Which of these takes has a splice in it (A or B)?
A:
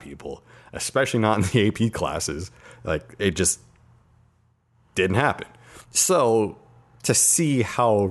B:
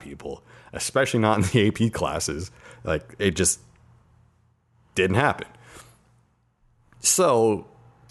A